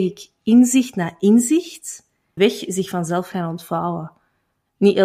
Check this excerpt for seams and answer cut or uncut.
cut